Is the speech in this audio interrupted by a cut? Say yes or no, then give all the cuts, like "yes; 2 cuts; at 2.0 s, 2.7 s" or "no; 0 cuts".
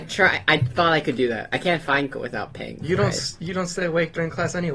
yes; 1 cut; at 2.1 s